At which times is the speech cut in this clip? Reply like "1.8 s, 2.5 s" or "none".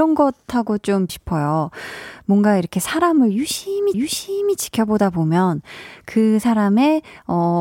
1.1 s, 3.9 s